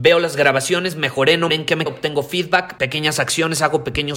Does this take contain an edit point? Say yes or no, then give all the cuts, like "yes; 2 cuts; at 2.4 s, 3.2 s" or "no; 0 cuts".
yes; 3 cuts; at 1.5 s, 1.9 s, 2.8 s